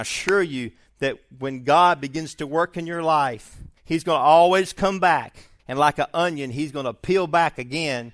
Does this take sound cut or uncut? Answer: cut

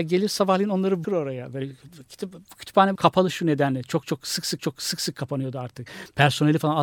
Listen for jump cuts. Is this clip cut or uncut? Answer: cut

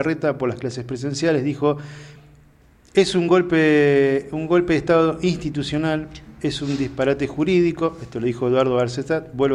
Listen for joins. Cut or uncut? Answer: uncut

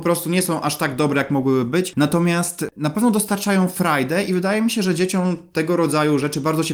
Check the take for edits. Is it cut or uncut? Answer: uncut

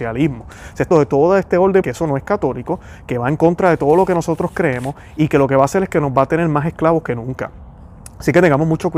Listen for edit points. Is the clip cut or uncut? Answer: cut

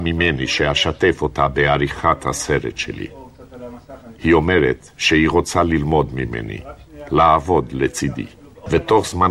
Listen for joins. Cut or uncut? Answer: uncut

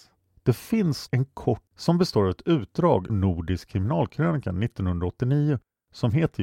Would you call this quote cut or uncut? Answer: cut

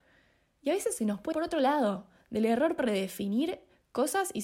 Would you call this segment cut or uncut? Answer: cut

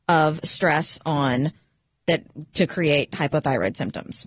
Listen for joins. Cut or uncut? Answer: uncut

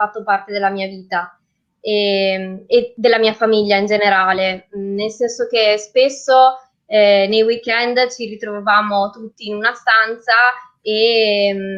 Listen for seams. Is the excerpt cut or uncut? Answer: uncut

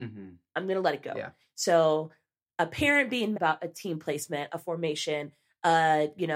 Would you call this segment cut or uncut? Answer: cut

